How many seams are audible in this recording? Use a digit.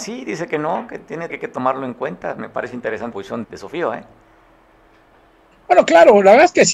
3